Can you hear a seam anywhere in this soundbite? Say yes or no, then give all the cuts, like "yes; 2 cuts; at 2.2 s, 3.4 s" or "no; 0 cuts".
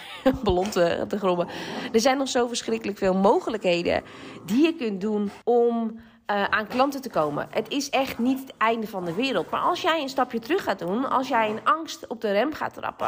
yes; 1 cut; at 5.4 s